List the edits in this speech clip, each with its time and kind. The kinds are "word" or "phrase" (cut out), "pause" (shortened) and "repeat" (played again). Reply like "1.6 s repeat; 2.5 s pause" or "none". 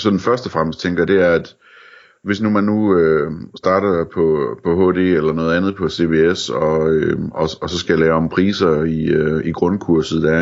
none